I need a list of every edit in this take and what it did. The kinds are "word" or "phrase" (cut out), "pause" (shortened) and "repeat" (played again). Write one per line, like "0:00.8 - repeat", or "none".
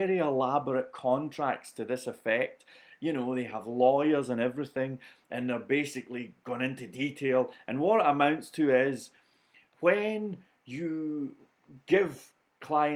none